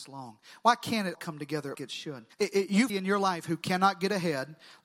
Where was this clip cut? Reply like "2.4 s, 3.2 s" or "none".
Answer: 1.1 s, 1.8 s, 2.3 s, 2.9 s